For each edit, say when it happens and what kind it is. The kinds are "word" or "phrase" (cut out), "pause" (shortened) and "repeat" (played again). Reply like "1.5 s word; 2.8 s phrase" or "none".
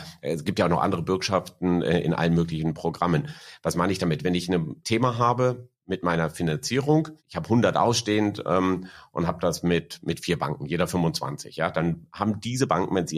4.8 s word; 7.2 s pause